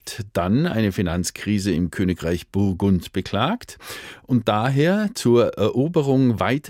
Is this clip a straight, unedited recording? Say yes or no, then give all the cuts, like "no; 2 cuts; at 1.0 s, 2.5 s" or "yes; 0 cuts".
yes; 0 cuts